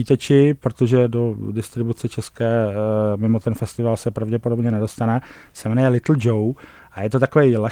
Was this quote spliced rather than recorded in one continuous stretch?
no; 0 cuts

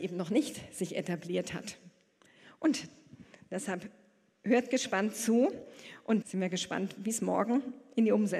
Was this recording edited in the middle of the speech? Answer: yes; 1 cut; at 6.2 s

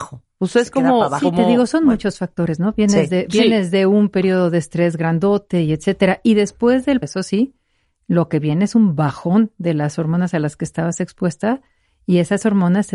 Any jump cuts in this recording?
yes; 1 cut; at 7.0 s

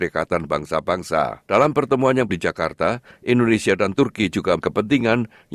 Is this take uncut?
no; 3 cuts; at 1.4 s, 2.3 s, 4.6 s

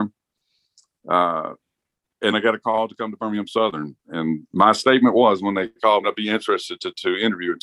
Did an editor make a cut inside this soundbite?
yes; 2 cuts; at 2.3 s, 6.0 s

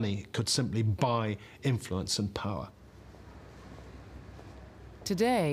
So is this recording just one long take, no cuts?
yes; 0 cuts

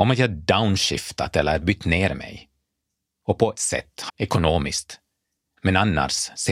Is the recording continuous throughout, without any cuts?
no; 2 cuts; at 3.6 s, 4.1 s

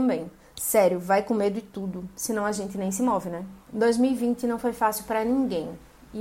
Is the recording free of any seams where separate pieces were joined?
no; 1 cut; at 3.6 s

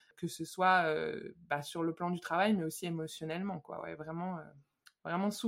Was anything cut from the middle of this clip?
no; 0 cuts

